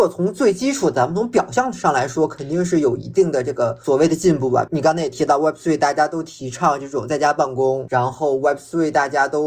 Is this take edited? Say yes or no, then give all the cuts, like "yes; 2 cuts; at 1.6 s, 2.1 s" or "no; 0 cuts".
no; 0 cuts